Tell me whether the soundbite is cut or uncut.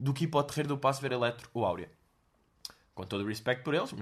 cut